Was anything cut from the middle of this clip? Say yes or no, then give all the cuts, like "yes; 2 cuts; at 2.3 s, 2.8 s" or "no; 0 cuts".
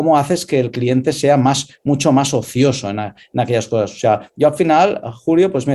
no; 0 cuts